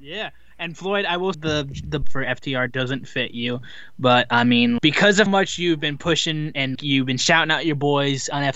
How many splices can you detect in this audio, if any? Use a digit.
5